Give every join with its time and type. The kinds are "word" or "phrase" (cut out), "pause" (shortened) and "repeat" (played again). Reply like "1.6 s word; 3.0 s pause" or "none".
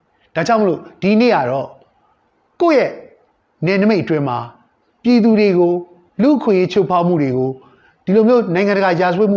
none